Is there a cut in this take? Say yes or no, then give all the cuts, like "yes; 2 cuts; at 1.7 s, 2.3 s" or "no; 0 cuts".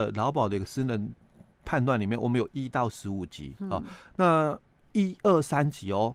no; 0 cuts